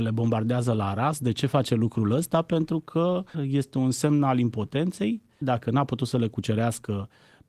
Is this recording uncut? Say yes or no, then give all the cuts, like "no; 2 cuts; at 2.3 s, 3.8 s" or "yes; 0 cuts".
no; 2 cuts; at 3.3 s, 5.4 s